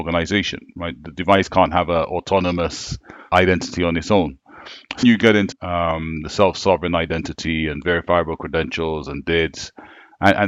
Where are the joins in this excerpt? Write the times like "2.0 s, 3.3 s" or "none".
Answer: 3.3 s, 5.0 s, 5.5 s